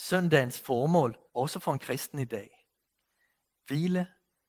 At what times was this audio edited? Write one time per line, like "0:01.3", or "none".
0:01.3